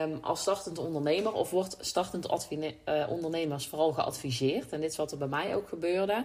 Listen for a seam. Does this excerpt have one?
no; 0 cuts

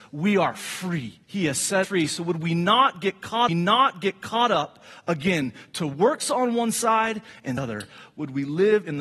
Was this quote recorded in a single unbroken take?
no; 4 cuts; at 1.2 s, 1.8 s, 3.5 s, 7.6 s

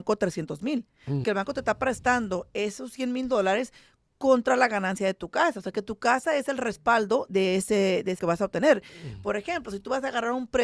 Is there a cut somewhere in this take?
yes; 3 cuts; at 1.2 s, 7.3 s, 8.2 s

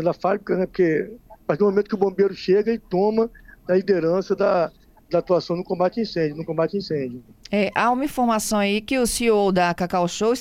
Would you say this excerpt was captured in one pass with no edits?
yes; 0 cuts

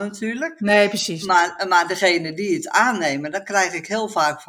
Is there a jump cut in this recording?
no; 0 cuts

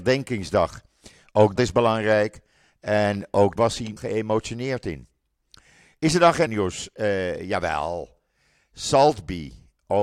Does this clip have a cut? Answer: yes; 4 cuts; at 1.6 s, 3.6 s, 4.0 s, 6.5 s

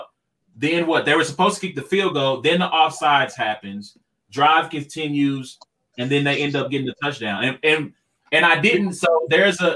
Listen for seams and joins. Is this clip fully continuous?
yes; 0 cuts

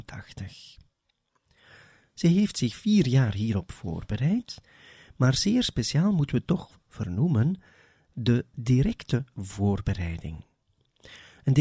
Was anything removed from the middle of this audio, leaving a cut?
no; 0 cuts

